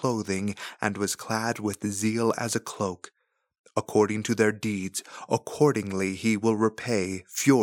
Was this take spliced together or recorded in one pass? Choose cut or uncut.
uncut